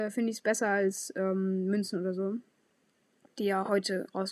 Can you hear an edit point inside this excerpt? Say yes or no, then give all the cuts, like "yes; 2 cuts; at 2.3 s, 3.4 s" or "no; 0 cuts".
no; 0 cuts